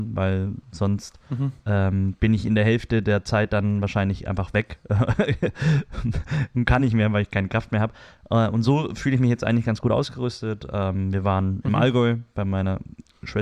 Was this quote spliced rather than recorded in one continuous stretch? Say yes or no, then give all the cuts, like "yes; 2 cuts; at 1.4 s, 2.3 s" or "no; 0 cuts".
no; 0 cuts